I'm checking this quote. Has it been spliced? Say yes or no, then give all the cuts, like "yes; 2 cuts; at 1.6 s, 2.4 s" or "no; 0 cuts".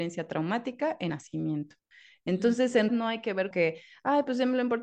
yes; 3 cuts; at 1.1 s, 2.9 s, 3.5 s